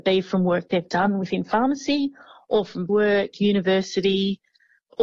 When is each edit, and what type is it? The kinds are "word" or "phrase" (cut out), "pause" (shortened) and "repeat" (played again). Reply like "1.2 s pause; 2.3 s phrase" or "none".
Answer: 2.9 s word

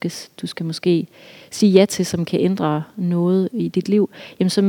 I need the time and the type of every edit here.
none

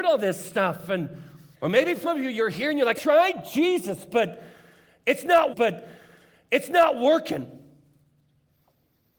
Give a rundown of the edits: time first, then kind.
1.5 s pause; 2.0 s word; 3.0 s word; 5.5 s repeat

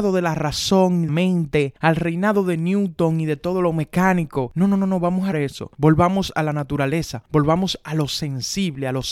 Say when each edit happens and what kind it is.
1.1 s word; 5.3 s word

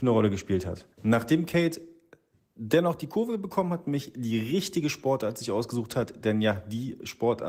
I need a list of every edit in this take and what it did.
0.9 s pause

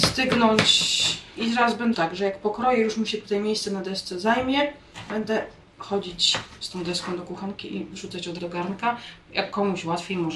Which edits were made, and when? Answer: 1.9 s word; 5.6 s pause; 8.4 s word

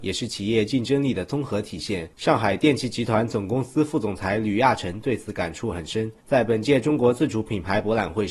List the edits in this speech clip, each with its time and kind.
6.2 s pause

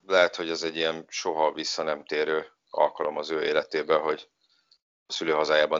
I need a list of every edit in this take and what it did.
none

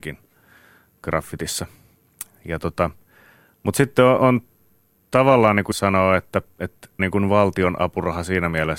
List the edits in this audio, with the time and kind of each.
4.2 s word; 5.7 s word; 7.0 s word

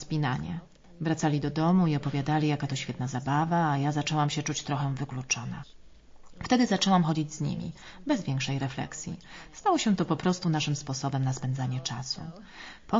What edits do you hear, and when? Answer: none

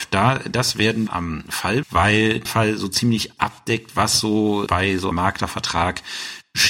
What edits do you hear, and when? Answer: 1.1 s word; 1.8 s word; 2.4 s word; 3.4 s word; 4.7 s word; 5.1 s word

